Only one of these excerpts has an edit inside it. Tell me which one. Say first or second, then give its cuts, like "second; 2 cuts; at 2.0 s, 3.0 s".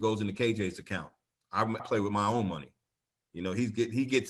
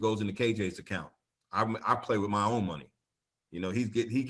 first; 1 cut; at 1.8 s